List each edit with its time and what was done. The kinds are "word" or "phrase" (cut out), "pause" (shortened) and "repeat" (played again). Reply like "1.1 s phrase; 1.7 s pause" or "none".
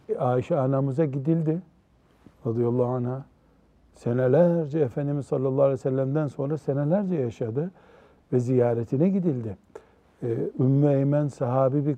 none